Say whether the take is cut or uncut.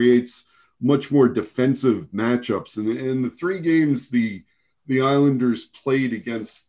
uncut